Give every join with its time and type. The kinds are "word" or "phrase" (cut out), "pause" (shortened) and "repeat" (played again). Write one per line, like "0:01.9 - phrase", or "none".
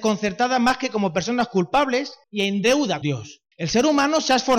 0:02.2 - pause
0:03.0 - word
0:03.5 - pause